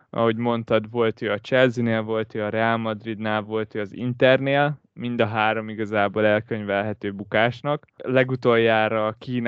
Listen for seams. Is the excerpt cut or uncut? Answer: uncut